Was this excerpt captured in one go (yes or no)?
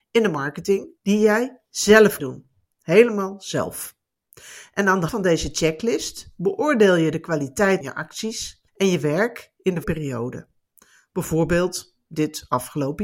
no